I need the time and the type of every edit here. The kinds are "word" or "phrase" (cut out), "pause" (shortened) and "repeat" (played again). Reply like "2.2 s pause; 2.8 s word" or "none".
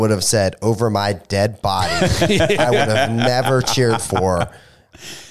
none